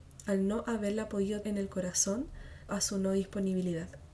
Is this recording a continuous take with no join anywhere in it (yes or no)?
no